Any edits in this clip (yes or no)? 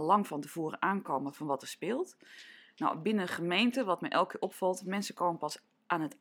no